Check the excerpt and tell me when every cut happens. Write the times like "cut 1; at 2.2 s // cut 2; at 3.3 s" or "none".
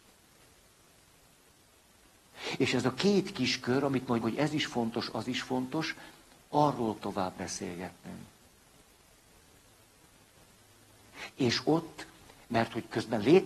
cut 1; at 4.2 s // cut 2; at 7.0 s